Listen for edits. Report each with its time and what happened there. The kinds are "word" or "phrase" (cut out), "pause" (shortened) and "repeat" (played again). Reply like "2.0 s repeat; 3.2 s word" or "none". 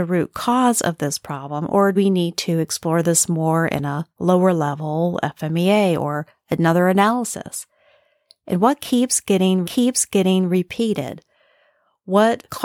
1.9 s word; 9.6 s repeat